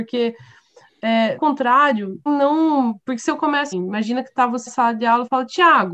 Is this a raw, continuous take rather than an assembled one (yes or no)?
no